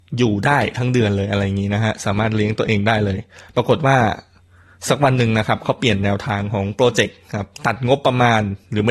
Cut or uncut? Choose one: uncut